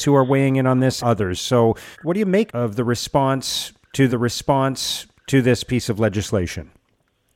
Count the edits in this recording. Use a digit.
4